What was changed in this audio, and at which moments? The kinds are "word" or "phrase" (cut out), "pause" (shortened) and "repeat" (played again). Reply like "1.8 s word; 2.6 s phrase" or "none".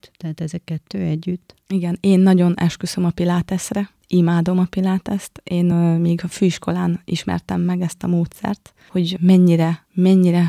none